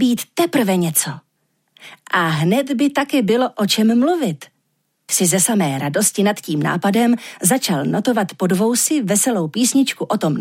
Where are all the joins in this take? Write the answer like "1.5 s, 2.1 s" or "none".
5.1 s